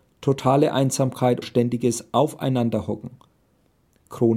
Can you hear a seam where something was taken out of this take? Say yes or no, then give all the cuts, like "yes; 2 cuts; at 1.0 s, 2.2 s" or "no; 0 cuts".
yes; 1 cut; at 1.4 s